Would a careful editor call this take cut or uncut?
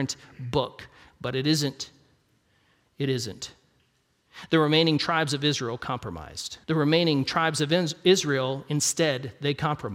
cut